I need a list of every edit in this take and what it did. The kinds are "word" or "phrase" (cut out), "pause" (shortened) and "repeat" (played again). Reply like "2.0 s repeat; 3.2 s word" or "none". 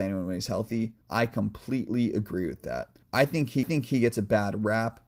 1.0 s pause; 3.0 s pause; 3.6 s repeat